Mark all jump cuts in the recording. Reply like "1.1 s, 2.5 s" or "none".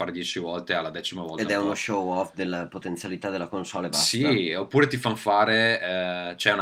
none